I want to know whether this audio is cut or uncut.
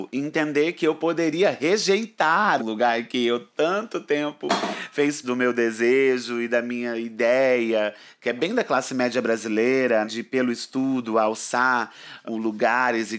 cut